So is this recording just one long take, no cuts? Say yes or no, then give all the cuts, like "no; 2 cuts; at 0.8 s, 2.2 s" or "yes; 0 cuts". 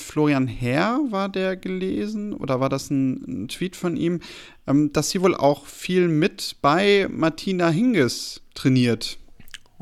yes; 0 cuts